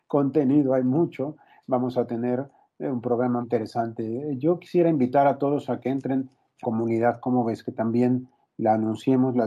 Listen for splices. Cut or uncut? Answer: cut